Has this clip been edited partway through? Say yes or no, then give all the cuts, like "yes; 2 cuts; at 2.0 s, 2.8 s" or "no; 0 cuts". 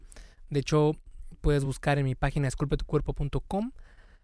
no; 0 cuts